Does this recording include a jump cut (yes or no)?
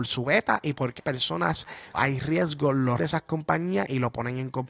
yes